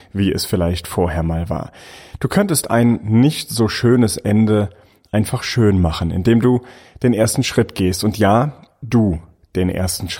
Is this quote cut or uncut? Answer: uncut